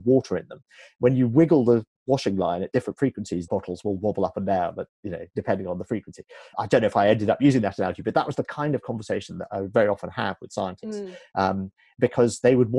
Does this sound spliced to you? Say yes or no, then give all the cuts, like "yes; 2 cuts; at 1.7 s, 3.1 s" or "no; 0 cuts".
yes; 2 cuts; at 3.5 s, 6.5 s